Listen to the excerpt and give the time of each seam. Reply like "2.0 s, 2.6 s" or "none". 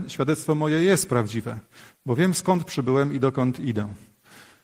none